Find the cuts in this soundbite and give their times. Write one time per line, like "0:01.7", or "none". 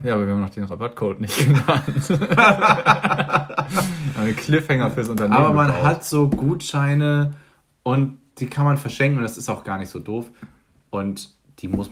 none